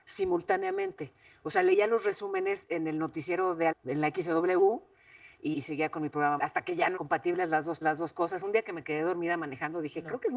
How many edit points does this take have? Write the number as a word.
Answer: five